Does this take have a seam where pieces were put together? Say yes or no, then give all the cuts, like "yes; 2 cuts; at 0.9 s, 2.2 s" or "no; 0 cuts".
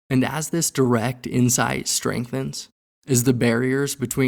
yes; 1 cut; at 2.8 s